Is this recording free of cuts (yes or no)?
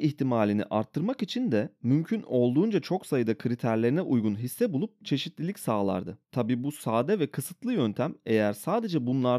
no